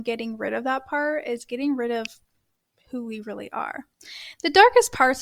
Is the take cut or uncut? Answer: uncut